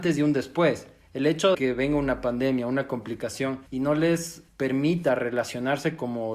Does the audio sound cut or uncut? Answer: cut